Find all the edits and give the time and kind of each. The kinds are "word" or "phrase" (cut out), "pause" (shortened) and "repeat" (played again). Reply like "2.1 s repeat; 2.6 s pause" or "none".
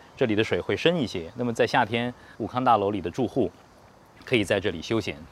2.4 s word